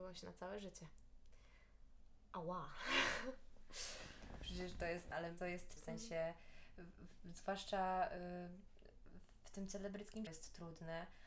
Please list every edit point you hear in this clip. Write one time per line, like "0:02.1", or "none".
0:05.1
0:05.8
0:10.3

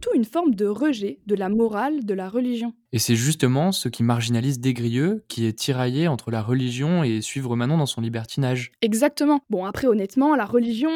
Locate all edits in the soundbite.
0:09.4

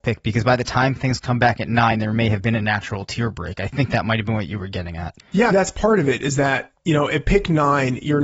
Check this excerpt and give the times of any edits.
0:05.2
0:05.5

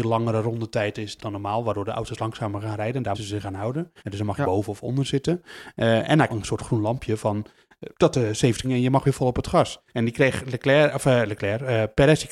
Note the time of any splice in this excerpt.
0:01.2
0:03.1
0:04.0
0:04.4
0:06.3
0:07.9
0:08.6
0:09.9

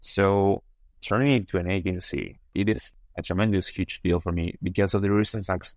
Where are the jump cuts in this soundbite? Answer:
none

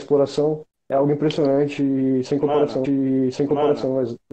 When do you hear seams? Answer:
0:02.8

